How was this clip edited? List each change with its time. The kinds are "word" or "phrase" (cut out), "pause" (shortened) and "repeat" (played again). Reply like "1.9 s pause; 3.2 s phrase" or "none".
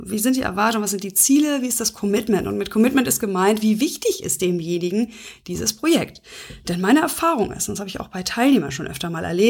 none